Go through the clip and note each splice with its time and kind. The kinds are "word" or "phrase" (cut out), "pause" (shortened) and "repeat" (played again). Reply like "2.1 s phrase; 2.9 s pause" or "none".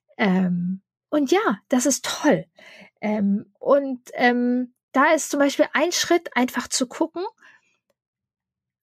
none